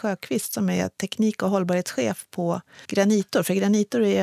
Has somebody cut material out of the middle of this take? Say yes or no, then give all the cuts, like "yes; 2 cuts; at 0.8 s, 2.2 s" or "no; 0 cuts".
yes; 1 cut; at 2.8 s